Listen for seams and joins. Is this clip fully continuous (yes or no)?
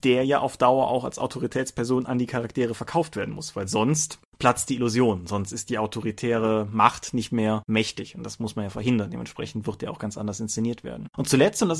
yes